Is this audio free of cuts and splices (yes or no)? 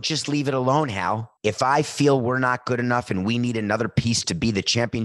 no